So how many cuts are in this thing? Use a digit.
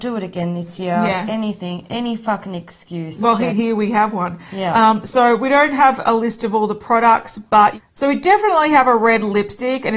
1